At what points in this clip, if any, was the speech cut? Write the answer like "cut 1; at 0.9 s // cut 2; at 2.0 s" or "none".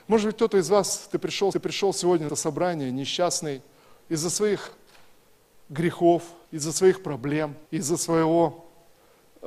cut 1; at 1.5 s // cut 2; at 2.3 s // cut 3; at 6.4 s // cut 4; at 7.7 s